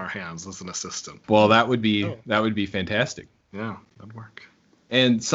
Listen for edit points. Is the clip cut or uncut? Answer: cut